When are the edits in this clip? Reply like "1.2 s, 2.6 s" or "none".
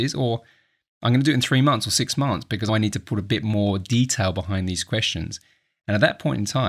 2.7 s